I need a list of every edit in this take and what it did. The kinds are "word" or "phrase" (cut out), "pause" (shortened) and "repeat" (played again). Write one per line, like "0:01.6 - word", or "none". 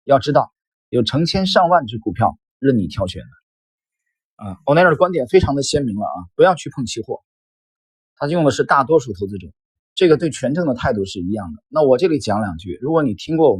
0:09.7 - pause